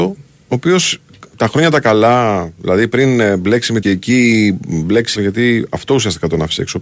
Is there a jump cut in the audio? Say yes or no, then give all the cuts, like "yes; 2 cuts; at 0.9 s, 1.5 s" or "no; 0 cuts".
yes; 3 cuts; at 1.3 s, 3.8 s, 5.2 s